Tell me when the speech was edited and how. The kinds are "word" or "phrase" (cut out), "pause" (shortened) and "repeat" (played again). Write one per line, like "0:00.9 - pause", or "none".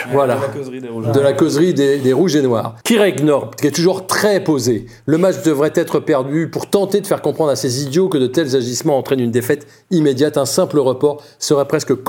0:02.8 - pause